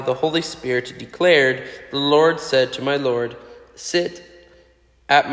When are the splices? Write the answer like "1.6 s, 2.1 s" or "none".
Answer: none